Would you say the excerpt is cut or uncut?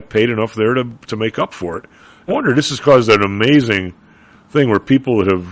cut